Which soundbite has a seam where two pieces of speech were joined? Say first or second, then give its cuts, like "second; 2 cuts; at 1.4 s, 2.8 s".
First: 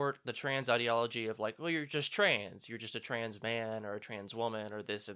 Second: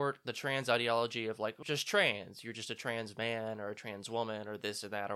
second; 1 cut; at 1.6 s